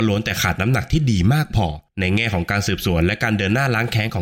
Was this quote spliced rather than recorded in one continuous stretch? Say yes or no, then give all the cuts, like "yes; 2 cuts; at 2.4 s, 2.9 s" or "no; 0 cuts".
yes; 1 cut; at 1.9 s